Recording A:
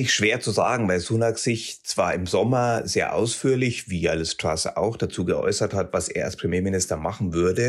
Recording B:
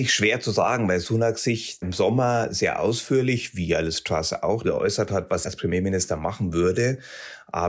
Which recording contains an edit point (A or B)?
B